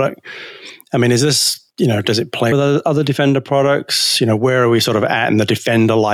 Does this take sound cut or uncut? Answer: cut